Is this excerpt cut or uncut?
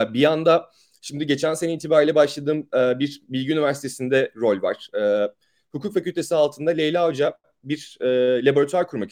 uncut